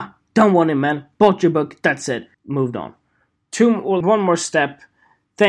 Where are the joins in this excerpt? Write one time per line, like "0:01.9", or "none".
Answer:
0:02.3
0:04.0